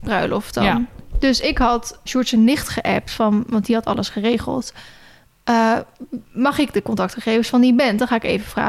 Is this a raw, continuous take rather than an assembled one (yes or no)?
no